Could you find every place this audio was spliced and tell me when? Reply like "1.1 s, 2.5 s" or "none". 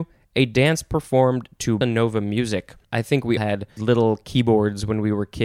1.8 s, 2.8 s, 3.4 s, 3.8 s